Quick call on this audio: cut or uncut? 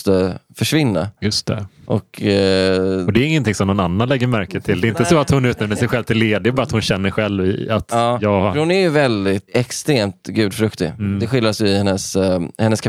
cut